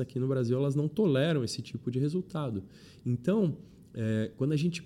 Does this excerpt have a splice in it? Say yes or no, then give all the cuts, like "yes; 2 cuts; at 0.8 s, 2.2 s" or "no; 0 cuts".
no; 0 cuts